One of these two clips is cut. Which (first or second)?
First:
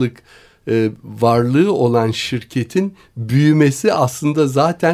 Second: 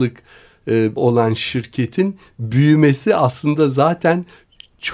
second